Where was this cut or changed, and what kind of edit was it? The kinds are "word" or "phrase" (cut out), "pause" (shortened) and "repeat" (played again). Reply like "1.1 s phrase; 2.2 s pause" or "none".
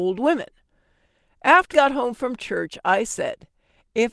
1.7 s word